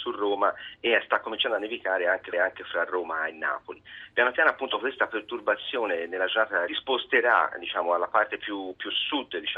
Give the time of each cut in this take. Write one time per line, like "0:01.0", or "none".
0:02.3
0:06.7